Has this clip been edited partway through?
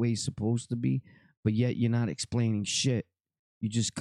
no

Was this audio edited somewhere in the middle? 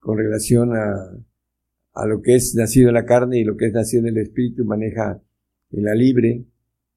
no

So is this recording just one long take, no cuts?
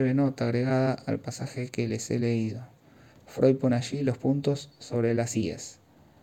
yes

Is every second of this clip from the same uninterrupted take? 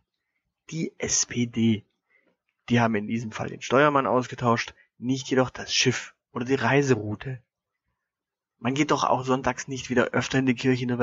yes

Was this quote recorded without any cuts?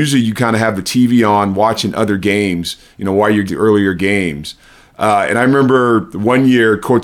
no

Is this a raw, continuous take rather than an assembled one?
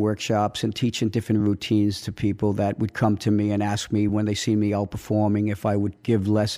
yes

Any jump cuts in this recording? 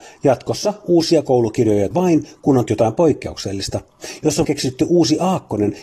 yes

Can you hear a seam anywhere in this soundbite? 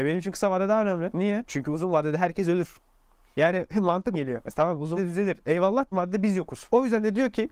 yes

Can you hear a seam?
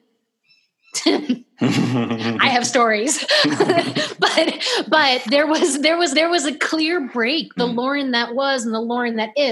yes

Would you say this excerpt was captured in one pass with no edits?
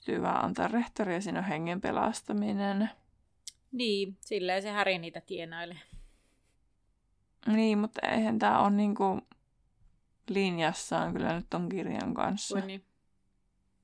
yes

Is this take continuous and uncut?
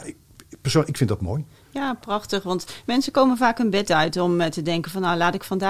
no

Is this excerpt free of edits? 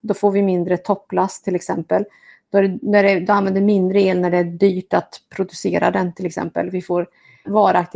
yes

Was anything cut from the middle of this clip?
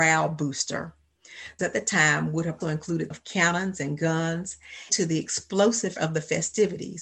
yes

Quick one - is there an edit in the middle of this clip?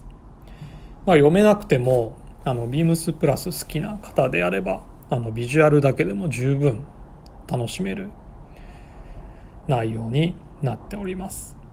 no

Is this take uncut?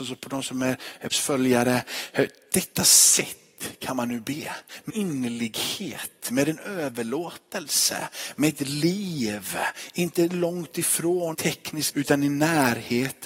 no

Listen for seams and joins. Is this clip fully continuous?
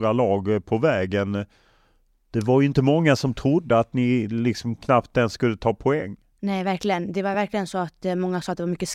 yes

